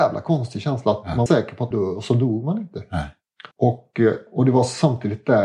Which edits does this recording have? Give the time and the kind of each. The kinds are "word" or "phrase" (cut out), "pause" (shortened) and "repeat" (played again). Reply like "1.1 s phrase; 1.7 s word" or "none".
1.3 s phrase; 1.7 s phrase; 3.5 s pause